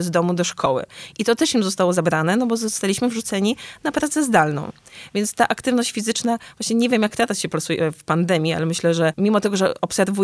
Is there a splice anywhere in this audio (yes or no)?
no